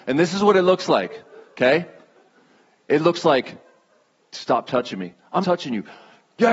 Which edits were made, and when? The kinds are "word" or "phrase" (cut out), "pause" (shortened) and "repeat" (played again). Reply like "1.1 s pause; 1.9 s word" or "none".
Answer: 5.4 s word